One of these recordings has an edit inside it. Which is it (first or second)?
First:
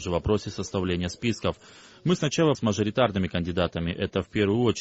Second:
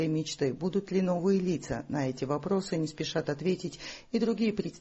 first